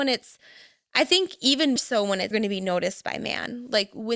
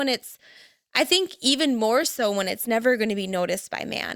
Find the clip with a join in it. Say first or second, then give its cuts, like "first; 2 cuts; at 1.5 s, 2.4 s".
first; 2 cuts; at 1.8 s, 2.3 s